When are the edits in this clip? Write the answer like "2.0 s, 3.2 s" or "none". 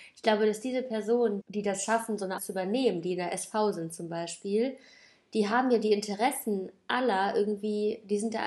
1.4 s, 2.4 s